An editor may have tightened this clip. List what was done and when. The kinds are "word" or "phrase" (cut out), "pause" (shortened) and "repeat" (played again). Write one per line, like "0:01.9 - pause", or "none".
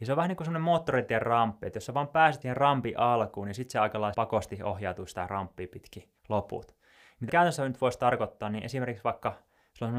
0:02.4 - word
0:04.1 - word
0:06.2 - pause
0:07.3 - word